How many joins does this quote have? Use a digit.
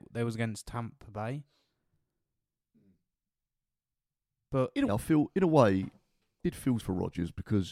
3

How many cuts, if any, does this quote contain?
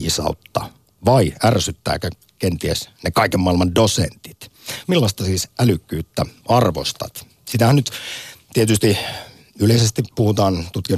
0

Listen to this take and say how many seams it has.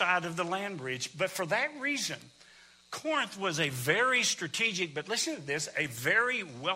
0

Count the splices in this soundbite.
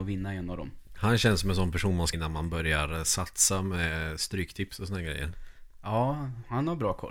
1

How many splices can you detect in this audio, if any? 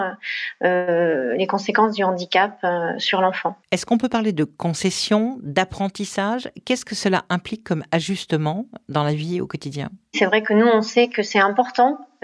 1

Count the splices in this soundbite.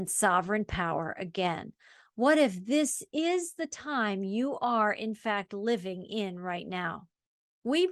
0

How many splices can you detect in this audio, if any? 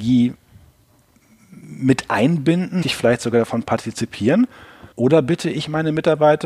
2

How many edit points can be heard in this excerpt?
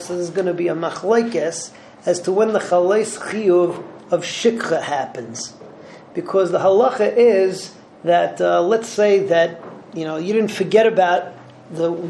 0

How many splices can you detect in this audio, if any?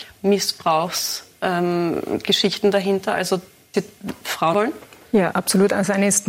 3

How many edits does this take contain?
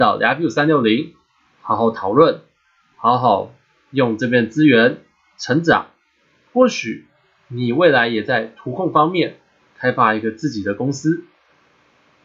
0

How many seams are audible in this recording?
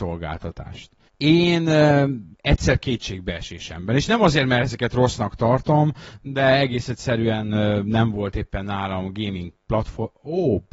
2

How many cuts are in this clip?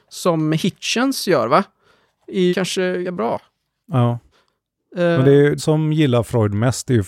3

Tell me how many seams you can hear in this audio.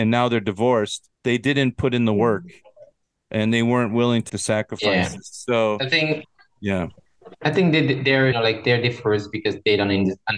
4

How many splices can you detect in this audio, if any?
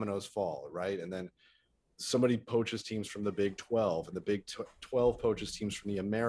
0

